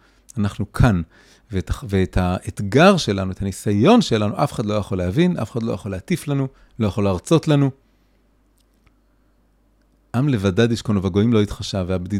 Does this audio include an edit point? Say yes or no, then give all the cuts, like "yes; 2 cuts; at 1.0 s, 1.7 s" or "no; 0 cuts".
no; 0 cuts